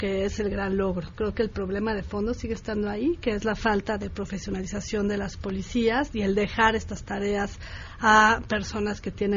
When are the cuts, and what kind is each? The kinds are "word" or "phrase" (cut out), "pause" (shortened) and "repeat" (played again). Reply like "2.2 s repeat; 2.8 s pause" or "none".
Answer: none